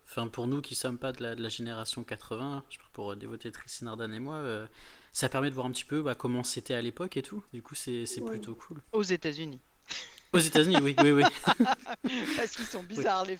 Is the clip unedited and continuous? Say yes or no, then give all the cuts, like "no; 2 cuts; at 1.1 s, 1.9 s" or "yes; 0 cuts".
no; 2 cuts; at 7.5 s, 8.8 s